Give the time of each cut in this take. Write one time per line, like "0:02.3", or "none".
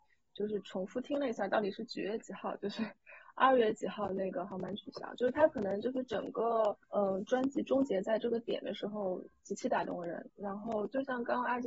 0:06.8